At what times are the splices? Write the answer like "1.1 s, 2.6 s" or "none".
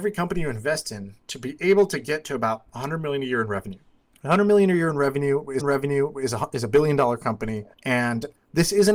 1.2 s, 4.1 s, 5.6 s, 7.7 s